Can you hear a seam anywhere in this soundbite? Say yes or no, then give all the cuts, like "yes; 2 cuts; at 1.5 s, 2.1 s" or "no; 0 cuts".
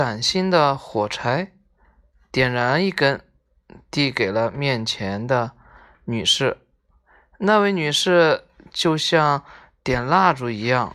no; 0 cuts